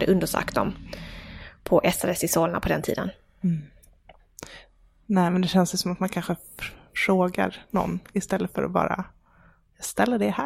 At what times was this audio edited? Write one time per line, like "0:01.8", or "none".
none